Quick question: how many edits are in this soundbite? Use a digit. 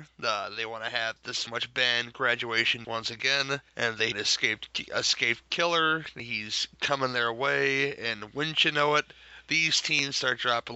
5